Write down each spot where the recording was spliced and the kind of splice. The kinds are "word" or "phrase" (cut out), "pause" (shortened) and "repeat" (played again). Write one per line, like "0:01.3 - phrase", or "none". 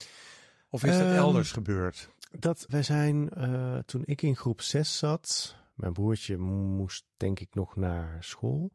0:02.7 - word